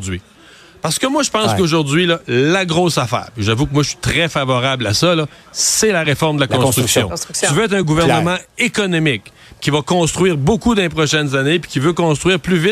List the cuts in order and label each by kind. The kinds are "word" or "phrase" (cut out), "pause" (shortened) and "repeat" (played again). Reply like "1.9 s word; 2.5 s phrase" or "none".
none